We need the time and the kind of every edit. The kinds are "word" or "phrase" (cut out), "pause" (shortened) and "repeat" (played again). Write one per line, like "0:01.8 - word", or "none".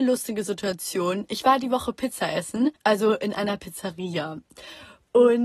0:02.8 - pause